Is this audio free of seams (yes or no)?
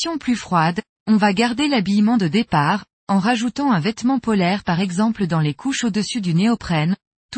yes